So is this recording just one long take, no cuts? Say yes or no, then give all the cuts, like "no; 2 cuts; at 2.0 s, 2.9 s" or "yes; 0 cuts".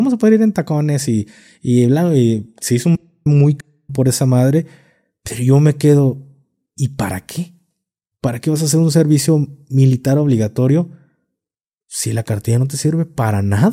yes; 0 cuts